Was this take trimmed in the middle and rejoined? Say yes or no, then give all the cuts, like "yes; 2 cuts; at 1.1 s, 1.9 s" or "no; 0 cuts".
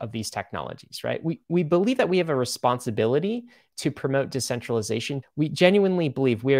yes; 2 cuts; at 1.4 s, 5.2 s